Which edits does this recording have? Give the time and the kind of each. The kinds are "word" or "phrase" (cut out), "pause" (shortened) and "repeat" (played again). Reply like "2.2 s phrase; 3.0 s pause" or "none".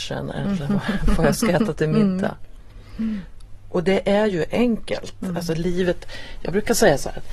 none